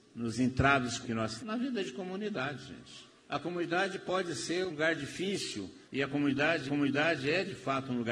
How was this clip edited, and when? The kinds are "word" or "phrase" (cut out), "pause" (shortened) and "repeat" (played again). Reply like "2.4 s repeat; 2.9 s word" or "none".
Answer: 1.0 s phrase; 1.4 s word; 3.2 s pause; 4.7 s word; 5.9 s pause; 6.7 s repeat